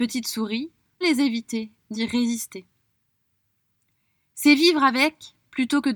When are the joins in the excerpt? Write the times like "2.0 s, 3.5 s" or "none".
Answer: 1.0 s, 1.9 s